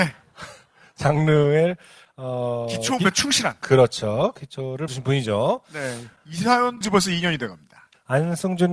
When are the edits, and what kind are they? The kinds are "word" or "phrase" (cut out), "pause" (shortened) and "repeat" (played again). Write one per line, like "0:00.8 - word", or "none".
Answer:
0:03.0 - word
0:04.9 - word
0:06.8 - word